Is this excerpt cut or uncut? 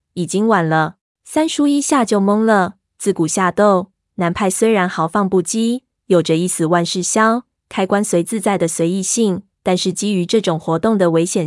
cut